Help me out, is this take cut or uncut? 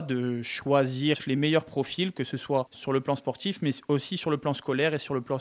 uncut